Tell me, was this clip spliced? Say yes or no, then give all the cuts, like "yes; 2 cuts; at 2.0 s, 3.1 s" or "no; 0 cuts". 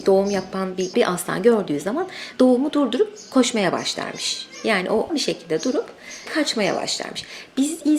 yes; 3 cuts; at 0.9 s, 5.1 s, 6.3 s